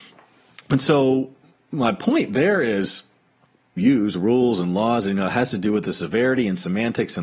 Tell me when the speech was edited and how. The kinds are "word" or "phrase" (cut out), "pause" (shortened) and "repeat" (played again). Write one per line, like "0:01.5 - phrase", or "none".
0:03.8 - phrase